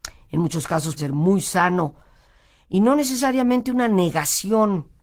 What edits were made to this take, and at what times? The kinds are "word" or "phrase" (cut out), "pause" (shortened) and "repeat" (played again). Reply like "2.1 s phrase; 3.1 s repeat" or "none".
1.0 s word